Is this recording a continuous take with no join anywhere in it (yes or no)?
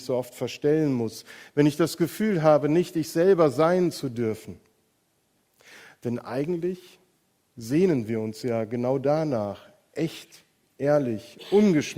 yes